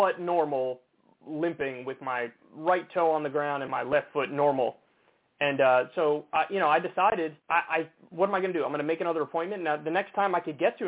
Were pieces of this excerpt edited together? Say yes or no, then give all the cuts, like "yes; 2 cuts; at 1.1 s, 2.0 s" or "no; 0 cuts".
yes; 2 cuts; at 3.7 s, 7.4 s